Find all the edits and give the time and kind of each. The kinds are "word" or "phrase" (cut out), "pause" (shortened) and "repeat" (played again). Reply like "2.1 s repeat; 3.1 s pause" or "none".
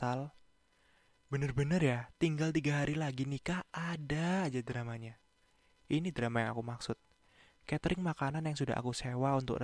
none